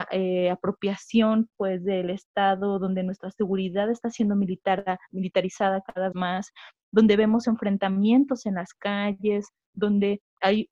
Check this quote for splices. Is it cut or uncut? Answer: cut